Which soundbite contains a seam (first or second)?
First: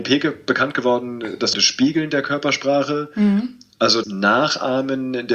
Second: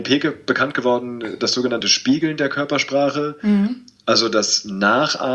first